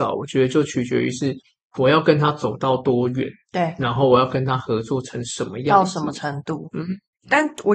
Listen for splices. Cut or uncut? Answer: uncut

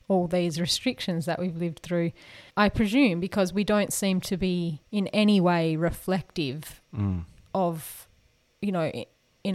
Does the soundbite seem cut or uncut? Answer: cut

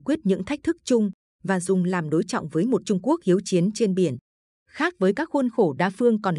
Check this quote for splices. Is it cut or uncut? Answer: uncut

